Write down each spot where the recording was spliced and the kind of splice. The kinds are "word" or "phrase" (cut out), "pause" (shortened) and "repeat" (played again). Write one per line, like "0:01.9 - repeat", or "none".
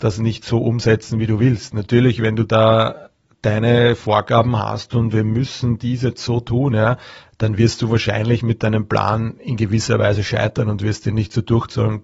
none